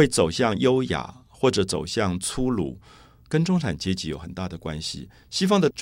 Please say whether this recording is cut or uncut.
uncut